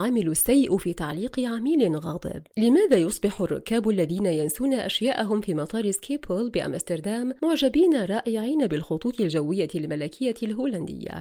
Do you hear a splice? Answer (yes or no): no